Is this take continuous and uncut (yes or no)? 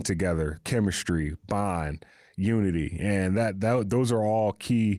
yes